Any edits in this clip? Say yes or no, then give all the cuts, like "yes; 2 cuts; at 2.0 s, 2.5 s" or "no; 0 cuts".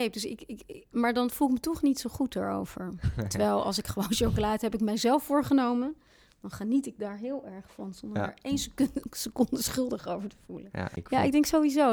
no; 0 cuts